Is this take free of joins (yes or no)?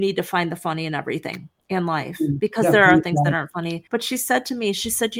no